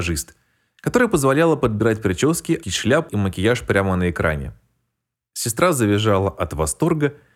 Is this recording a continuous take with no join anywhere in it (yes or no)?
no